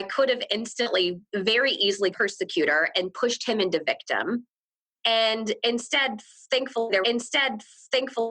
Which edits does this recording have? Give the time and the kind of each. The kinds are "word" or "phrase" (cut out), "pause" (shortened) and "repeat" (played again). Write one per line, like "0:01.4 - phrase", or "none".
0:01.3 - pause
0:02.1 - word
0:07.0 - repeat